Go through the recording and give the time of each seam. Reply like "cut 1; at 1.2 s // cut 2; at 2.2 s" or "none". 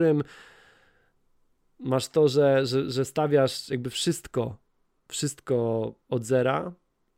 none